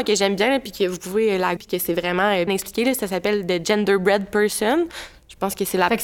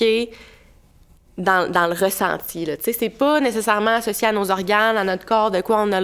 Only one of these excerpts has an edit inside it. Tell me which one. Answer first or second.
first